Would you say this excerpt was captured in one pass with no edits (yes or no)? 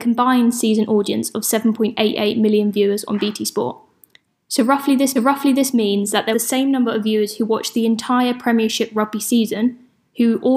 no